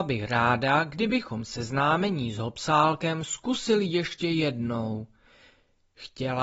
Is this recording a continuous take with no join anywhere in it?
yes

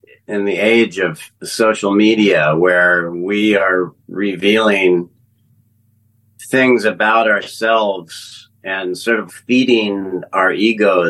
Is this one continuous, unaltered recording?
no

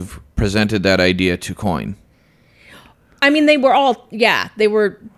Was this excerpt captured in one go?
yes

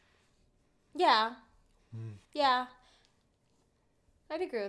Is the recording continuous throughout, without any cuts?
no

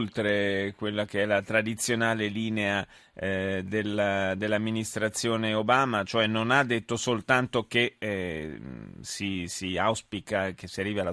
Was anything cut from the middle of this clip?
no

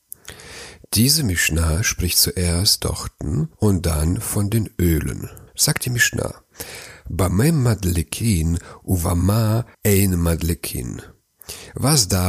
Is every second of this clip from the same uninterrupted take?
no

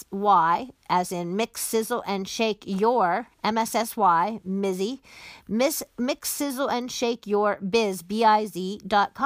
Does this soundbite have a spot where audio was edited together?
no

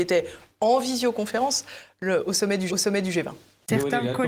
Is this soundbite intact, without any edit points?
no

